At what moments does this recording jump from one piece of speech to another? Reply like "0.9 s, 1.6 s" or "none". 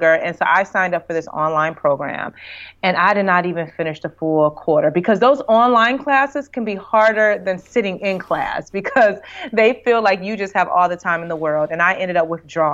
none